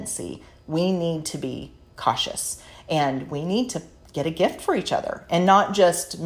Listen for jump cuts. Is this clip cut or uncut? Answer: uncut